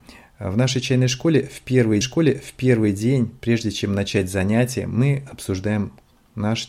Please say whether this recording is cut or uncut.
cut